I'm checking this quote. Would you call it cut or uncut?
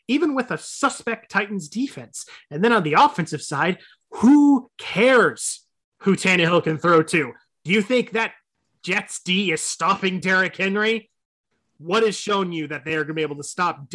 uncut